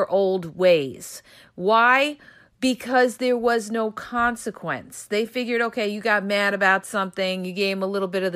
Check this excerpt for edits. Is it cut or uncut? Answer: uncut